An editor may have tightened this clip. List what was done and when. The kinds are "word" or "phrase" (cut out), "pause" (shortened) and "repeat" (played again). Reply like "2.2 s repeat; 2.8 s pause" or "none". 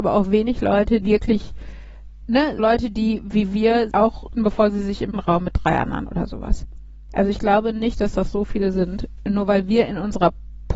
1.0 s word; 2.6 s word; 3.9 s word; 4.4 s word; 5.1 s word; 6.1 s word